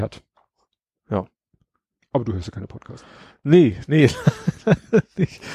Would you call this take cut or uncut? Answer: uncut